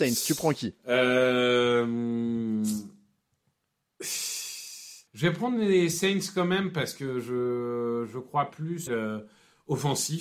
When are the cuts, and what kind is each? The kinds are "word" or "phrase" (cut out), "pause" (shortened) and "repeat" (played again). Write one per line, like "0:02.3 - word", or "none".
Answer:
0:05.1 - pause
0:08.9 - phrase